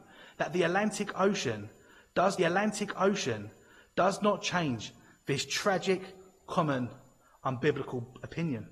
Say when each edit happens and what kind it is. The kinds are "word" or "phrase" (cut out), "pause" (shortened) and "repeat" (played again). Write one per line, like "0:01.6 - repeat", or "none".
0:02.4 - repeat